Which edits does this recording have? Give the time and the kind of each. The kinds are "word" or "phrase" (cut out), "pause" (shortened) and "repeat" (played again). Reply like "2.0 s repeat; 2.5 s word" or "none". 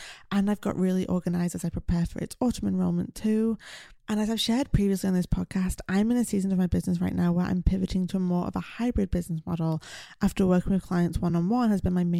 none

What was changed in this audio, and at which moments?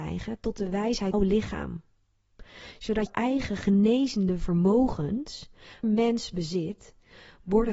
1.1 s phrase; 3.1 s word; 5.8 s phrase

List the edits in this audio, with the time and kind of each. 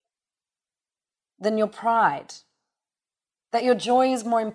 none

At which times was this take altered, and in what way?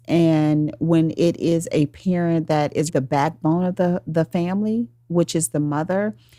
2.9 s word

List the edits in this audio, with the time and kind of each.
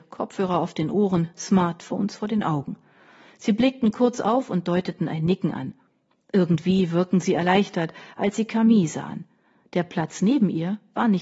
none

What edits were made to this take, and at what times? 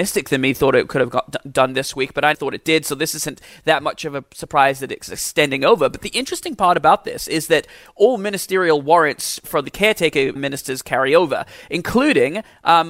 2.3 s word; 10.4 s word

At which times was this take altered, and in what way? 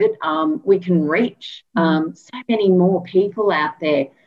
1.7 s pause

